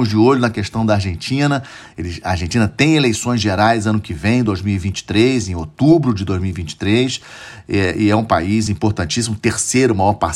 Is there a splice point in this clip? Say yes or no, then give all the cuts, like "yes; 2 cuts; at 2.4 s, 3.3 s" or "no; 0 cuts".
no; 0 cuts